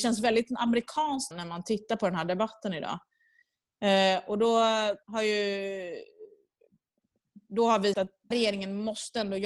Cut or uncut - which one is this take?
cut